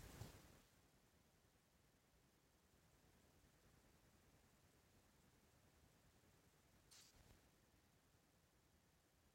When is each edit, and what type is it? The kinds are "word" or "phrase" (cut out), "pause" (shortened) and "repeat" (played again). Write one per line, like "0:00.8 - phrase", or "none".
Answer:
none

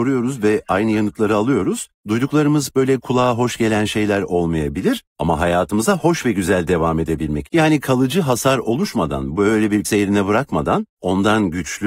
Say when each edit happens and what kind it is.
0:02.7 - word
0:07.5 - word
0:09.8 - word

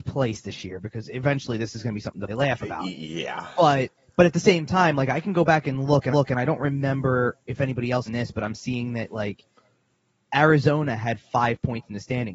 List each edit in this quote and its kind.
0:02.3 - word
0:04.0 - pause
0:06.1 - repeat
0:08.1 - phrase

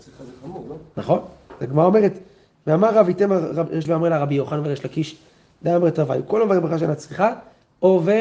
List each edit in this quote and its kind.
0:03.9 - word

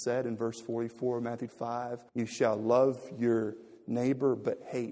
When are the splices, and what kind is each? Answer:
0:01.5 - word
0:02.1 - pause

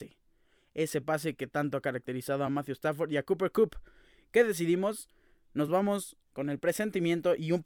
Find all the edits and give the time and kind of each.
none

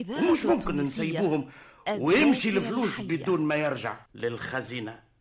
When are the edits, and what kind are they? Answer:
0:04.1 - pause

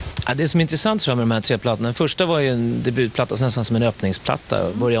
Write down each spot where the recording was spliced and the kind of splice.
none

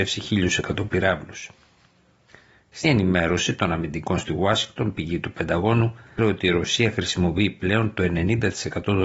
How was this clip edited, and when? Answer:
0:02.8 - word
0:04.2 - word
0:06.2 - word

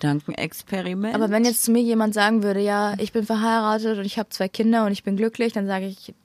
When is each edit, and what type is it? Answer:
none

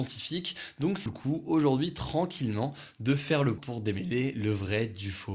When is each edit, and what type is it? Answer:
0:01.1 - word
0:03.6 - word

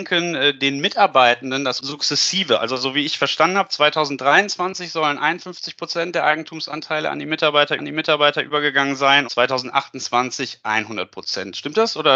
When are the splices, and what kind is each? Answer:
0:01.8 - word
0:07.8 - repeat
0:09.2 - word

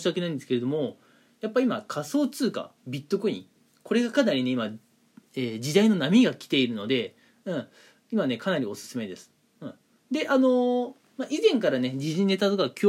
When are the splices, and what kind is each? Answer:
none

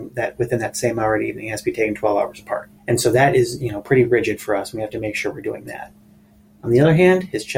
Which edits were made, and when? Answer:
0:02.8 - pause

